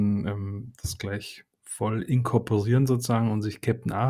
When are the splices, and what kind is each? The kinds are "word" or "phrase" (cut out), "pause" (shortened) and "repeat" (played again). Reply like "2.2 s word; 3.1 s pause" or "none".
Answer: 1.5 s pause